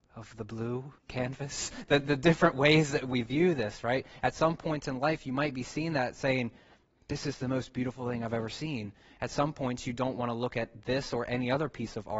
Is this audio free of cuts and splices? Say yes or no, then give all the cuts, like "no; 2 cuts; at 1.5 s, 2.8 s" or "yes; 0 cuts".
yes; 0 cuts